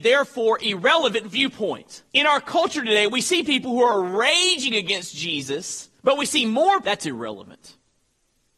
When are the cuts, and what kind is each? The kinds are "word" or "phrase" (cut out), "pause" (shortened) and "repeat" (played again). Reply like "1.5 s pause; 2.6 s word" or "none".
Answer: 2.1 s pause; 6.0 s pause; 6.8 s phrase

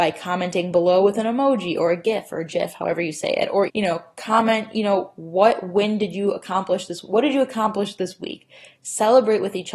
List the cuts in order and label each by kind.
3.7 s word

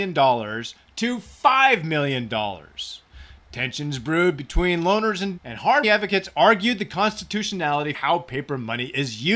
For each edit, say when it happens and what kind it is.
5.4 s word; 5.8 s word; 7.9 s word

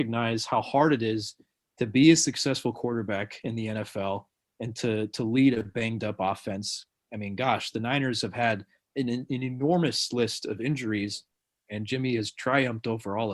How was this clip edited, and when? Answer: none

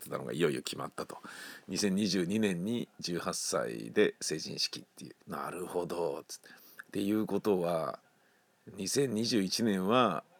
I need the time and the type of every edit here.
5.2 s pause

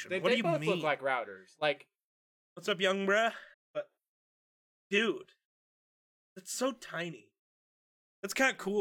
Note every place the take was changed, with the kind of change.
3.5 s pause

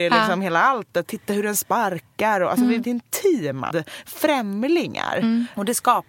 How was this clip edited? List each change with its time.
1.0 s word; 2.8 s word; 3.7 s word

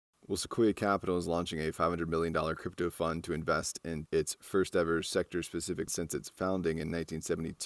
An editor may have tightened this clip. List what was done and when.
4.1 s word; 5.9 s word

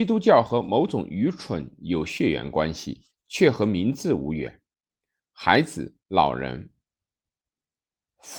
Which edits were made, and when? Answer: 3.1 s pause; 6.0 s pause

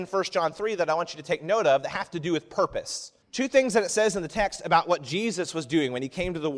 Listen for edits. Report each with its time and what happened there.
3.2 s pause

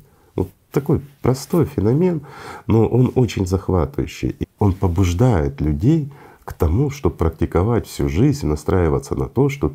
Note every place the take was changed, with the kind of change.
4.4 s word

